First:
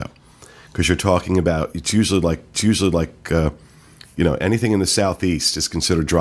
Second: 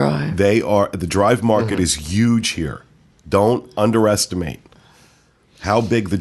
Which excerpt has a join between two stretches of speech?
first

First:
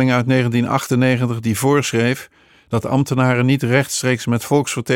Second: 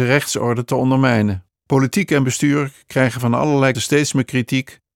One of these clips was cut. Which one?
second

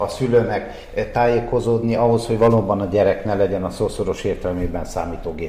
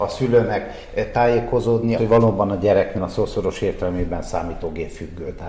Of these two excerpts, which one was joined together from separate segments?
second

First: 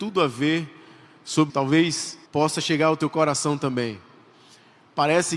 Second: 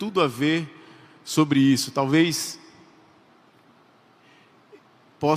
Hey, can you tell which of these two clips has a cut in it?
first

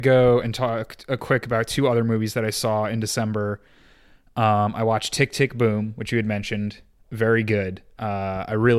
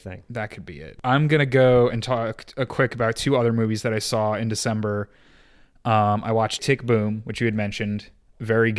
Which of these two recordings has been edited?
second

